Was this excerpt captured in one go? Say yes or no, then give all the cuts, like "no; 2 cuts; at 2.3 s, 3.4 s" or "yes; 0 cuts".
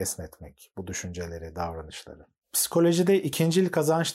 yes; 0 cuts